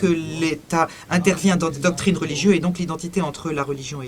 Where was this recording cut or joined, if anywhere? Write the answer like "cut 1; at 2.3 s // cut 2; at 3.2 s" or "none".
none